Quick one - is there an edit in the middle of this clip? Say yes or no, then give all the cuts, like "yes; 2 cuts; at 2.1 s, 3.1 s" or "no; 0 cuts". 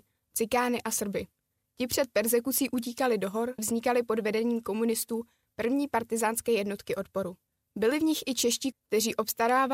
yes; 2 cuts; at 3.6 s, 8.7 s